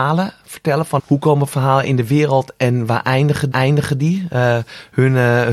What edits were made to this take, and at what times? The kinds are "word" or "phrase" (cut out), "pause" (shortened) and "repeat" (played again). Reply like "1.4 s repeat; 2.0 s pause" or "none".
1.0 s word; 3.5 s repeat